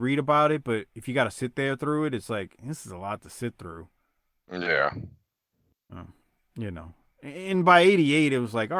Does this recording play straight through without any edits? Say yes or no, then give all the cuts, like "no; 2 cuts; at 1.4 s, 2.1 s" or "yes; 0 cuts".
yes; 0 cuts